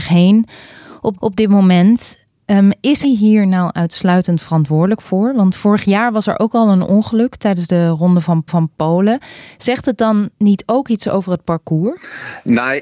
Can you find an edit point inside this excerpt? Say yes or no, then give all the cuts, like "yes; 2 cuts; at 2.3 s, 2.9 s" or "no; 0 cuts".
yes; 5 cuts; at 1.2 s, 2.4 s, 3.0 s, 8.5 s, 10.3 s